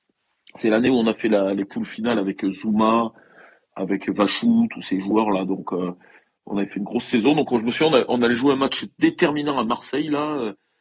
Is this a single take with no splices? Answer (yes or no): yes